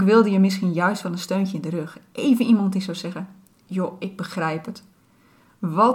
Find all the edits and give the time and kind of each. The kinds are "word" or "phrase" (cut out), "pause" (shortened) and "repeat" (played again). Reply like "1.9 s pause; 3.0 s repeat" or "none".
none

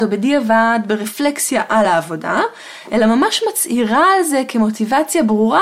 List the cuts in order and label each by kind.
none

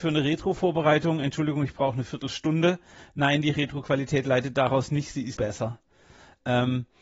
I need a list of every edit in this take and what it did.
5.4 s word

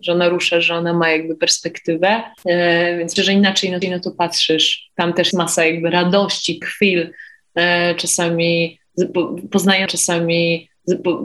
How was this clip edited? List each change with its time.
2.4 s pause; 3.2 s word; 3.8 s repeat; 5.3 s word; 6.6 s word; 9.9 s repeat

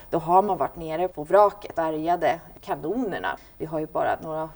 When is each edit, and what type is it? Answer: 1.1 s word; 1.7 s word

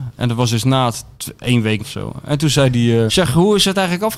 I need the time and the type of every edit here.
1.8 s phrase; 3.1 s word

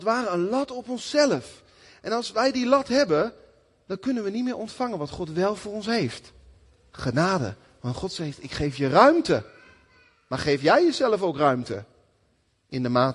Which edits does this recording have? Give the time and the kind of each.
none

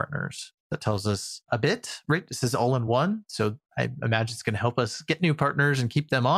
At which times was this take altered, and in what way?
none

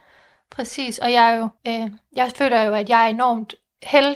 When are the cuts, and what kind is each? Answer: 1.6 s pause

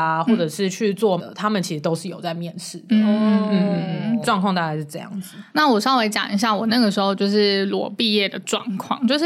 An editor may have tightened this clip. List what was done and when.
1.2 s word; 4.2 s word; 5.5 s pause

